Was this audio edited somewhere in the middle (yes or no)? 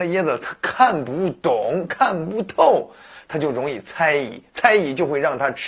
no